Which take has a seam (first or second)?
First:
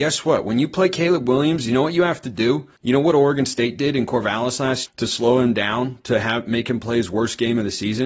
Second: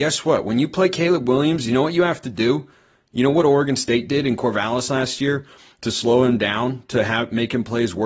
first